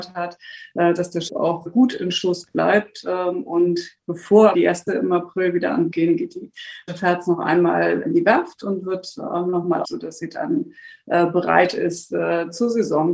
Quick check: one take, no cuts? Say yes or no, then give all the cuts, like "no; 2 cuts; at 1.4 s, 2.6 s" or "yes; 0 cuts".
no; 8 cuts; at 1.3 s, 1.7 s, 4.5 s, 4.9 s, 5.9 s, 6.9 s, 8.0 s, 9.8 s